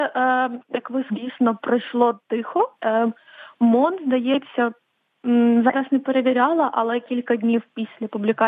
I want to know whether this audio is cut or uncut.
cut